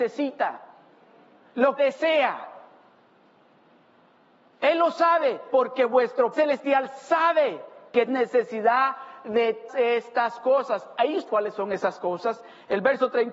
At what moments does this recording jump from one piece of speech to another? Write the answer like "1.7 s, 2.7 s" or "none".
1.8 s, 5.5 s, 6.3 s, 8.1 s, 9.7 s, 11.3 s